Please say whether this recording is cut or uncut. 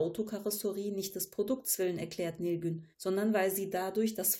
cut